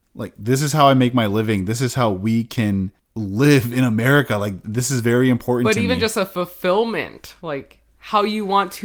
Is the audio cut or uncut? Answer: cut